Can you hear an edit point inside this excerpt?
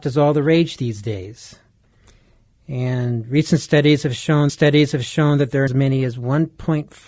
yes; 2 cuts; at 4.5 s, 5.7 s

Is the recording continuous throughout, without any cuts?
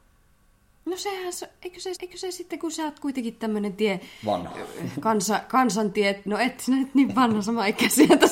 no; 1 cut; at 2.0 s

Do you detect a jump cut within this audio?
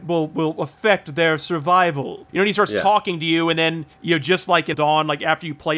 yes; 3 cuts; at 2.3 s, 3.9 s, 4.7 s

